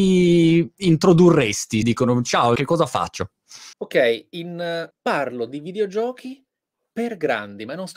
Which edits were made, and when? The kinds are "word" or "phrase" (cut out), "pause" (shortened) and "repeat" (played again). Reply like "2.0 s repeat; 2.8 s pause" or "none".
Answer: 1.8 s word; 2.6 s phrase; 3.7 s pause; 4.9 s word